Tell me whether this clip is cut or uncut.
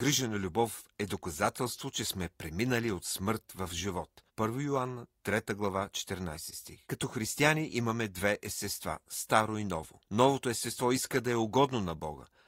cut